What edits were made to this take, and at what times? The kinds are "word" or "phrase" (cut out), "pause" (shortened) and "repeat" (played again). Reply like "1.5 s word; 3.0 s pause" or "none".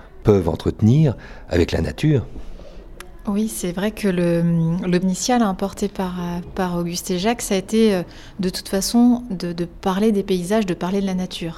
5.0 s word